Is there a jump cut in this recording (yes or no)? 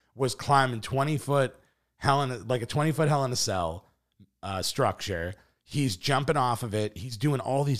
no